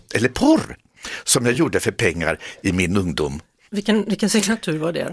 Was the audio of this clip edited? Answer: no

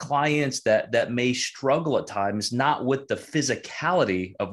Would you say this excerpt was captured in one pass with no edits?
yes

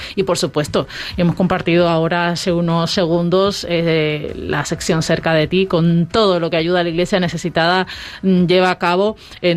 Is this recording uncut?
yes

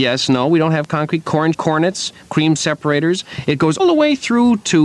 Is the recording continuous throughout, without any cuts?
no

